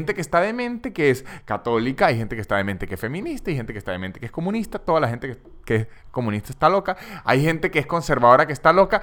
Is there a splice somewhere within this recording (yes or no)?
yes